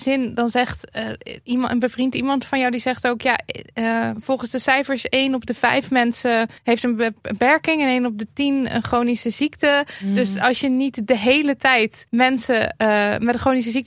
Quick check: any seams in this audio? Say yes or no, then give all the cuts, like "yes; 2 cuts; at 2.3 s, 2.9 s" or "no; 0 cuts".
yes; 2 cuts; at 6.6 s, 12.1 s